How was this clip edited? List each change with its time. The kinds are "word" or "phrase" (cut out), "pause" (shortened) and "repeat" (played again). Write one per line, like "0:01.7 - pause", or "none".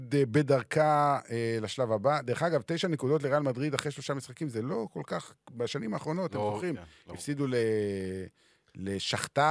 none